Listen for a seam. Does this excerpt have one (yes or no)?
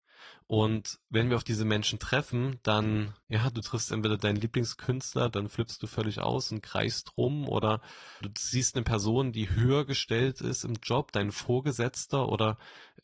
yes